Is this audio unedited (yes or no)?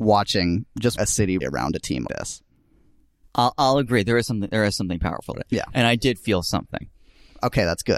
no